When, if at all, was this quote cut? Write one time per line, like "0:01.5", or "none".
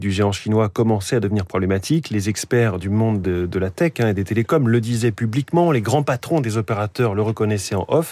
none